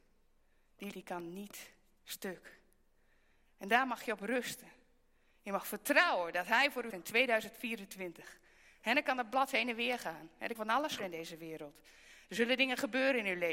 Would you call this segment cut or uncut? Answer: cut